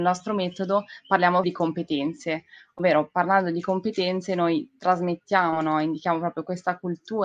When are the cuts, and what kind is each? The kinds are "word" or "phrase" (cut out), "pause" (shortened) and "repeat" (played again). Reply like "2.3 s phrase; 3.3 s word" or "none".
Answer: 1.4 s word